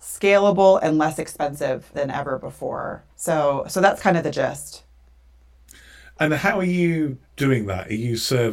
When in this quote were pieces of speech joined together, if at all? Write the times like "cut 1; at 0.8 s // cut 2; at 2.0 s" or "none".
cut 1; at 1.9 s // cut 2; at 3.1 s

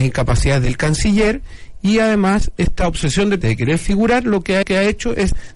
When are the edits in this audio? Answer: cut 1; at 3.4 s // cut 2; at 4.6 s

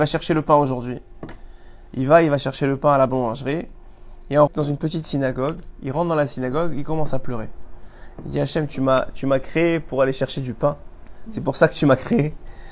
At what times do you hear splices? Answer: cut 1; at 4.5 s // cut 2; at 4.8 s

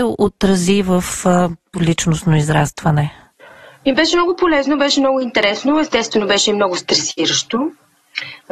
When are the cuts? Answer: cut 1; at 1.7 s

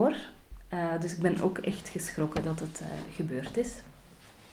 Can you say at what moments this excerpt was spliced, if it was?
none

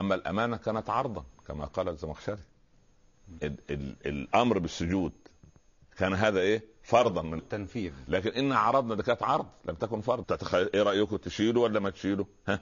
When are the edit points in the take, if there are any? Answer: cut 1; at 3.4 s // cut 2; at 7.4 s // cut 3; at 10.2 s

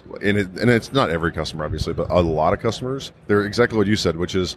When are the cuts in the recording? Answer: cut 1; at 3.2 s

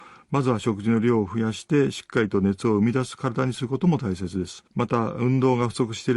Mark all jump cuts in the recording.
cut 1; at 4.7 s

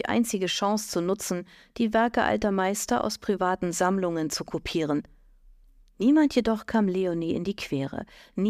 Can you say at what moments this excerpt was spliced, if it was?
none

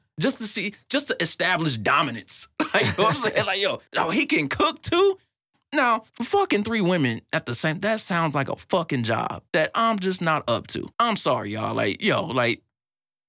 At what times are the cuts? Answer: cut 1; at 3.9 s // cut 2; at 6.1 s // cut 3; at 9.5 s // cut 4; at 10.9 s

